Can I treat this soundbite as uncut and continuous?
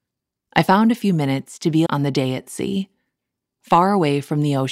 no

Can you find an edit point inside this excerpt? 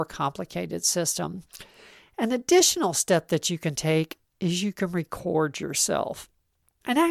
no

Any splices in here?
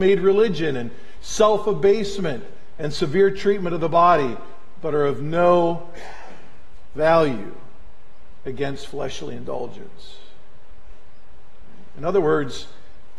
no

